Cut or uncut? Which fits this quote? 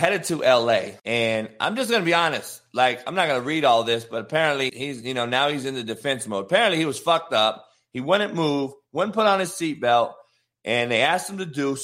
cut